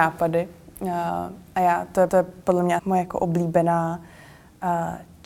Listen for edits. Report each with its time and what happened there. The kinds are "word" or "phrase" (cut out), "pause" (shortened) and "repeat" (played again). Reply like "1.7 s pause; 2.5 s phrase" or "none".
2.1 s repeat; 2.8 s word